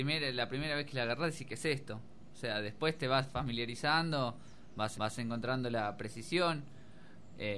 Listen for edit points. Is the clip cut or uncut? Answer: cut